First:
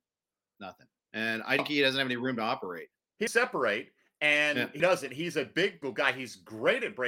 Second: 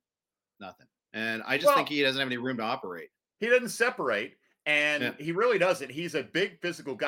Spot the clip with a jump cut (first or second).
first